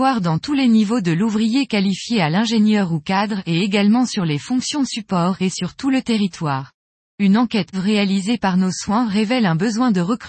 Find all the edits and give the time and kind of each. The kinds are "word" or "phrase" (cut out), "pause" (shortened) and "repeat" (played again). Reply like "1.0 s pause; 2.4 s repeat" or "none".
5.5 s word; 7.7 s word